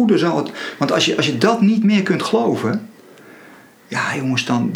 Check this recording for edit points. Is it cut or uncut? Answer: uncut